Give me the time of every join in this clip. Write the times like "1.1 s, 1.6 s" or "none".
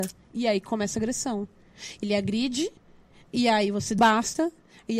2.0 s, 4.0 s

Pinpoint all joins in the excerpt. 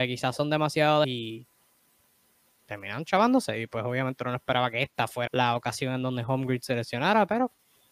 1.0 s, 5.3 s

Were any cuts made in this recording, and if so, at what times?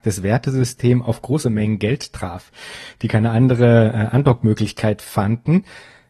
none

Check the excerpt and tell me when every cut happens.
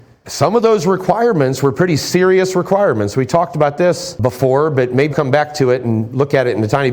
5.1 s

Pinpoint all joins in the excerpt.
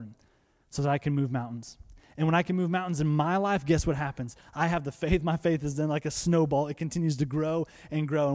none

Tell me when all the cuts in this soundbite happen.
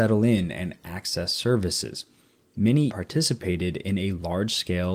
2.9 s

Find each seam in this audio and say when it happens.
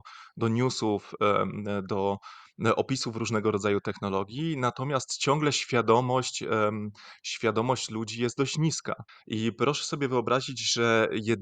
9.1 s

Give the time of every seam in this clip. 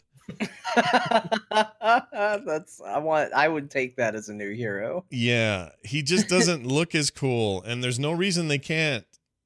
none

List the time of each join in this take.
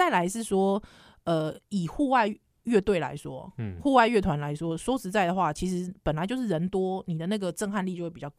none

